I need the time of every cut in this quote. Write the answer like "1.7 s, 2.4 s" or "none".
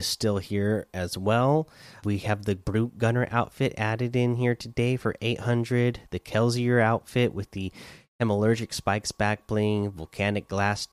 2.0 s